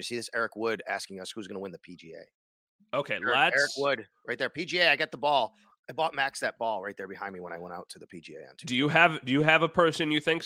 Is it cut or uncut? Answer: uncut